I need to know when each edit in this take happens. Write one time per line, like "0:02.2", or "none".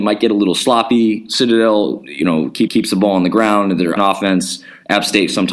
0:02.7
0:04.0